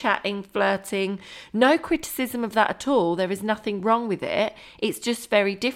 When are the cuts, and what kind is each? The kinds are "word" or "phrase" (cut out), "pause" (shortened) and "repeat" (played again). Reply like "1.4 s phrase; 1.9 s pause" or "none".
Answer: none